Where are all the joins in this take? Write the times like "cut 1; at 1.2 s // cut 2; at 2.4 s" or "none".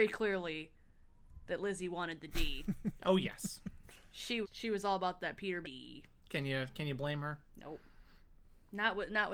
cut 1; at 4.4 s // cut 2; at 5.6 s // cut 3; at 6.2 s